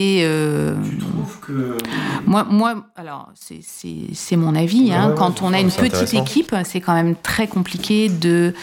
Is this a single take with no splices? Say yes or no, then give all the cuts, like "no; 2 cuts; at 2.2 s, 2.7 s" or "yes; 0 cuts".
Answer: yes; 0 cuts